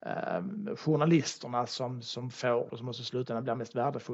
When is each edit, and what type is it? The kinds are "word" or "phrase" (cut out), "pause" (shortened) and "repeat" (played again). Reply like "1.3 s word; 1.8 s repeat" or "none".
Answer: 2.7 s phrase